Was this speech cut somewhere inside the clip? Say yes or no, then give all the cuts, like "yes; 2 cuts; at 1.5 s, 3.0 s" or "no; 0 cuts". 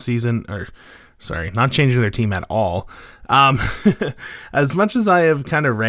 no; 0 cuts